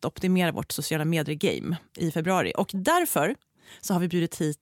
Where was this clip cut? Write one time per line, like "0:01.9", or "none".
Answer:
0:01.9

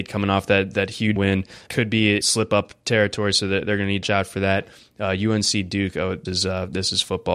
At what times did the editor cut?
0:01.2
0:01.7
0:02.2
0:04.0
0:06.3

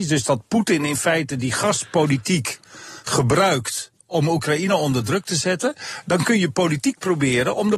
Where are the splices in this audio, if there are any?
none

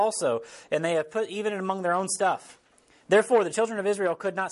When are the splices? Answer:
none

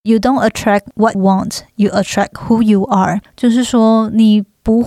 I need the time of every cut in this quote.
0:01.1

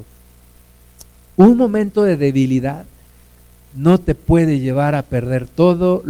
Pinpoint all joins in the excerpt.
none

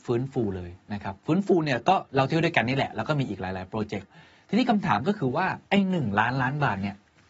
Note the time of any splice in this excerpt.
0:05.7

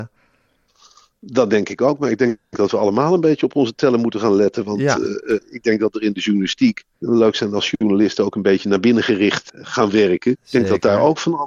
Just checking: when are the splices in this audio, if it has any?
0:05.4
0:06.9
0:09.5

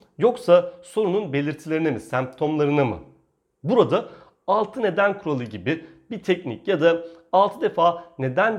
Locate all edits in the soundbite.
none

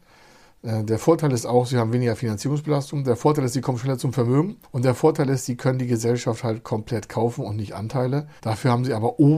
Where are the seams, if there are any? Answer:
0:04.6
0:08.4

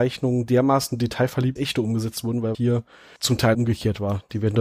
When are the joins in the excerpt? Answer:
0:01.6
0:02.5
0:03.2
0:03.5

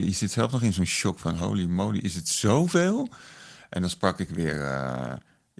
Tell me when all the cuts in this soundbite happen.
none

